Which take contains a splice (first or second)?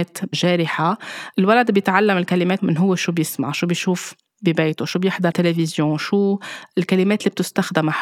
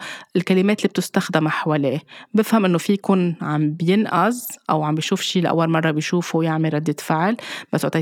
first